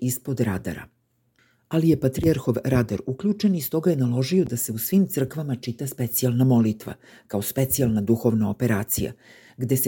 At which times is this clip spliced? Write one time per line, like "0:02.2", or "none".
none